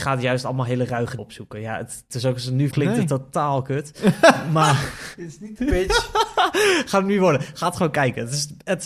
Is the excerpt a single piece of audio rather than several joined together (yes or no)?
no